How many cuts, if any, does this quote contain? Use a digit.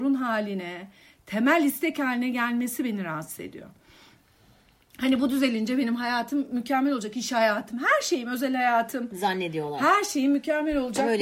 0